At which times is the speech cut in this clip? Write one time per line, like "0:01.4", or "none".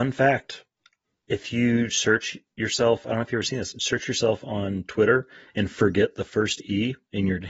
none